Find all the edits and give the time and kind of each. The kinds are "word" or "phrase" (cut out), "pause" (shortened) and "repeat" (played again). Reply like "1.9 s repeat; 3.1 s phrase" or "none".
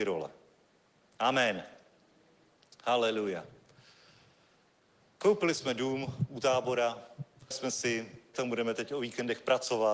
7.5 s word; 8.3 s word